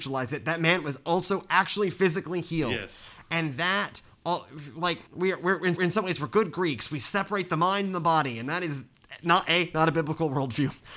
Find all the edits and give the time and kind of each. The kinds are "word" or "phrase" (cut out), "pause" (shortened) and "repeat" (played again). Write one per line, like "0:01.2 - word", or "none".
0:05.1 - word
0:05.8 - repeat